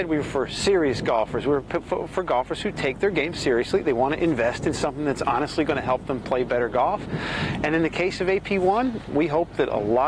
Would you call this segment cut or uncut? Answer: cut